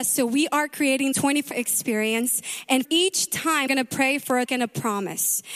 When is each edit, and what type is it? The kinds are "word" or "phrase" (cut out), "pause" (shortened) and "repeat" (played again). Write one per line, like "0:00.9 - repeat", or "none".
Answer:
0:01.1 - word
0:01.5 - word
0:02.8 - word
0:03.7 - word
0:04.5 - word